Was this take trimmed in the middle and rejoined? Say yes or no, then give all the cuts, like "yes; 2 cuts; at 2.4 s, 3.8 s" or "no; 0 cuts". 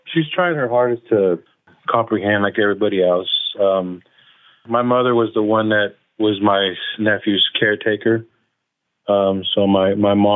no; 0 cuts